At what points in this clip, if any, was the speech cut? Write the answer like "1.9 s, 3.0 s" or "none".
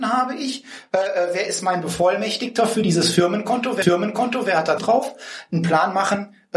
3.8 s, 4.8 s